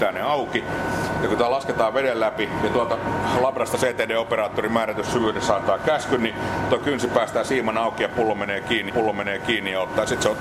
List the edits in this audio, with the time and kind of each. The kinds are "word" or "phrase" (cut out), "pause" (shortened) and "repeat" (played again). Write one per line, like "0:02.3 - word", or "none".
0:08.9 - repeat